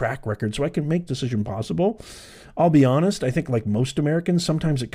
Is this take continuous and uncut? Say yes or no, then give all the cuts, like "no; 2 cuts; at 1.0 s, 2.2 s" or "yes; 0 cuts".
no; 1 cut; at 1.1 s